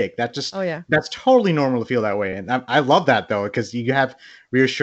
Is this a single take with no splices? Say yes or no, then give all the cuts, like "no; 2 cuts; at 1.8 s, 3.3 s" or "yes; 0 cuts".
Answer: yes; 0 cuts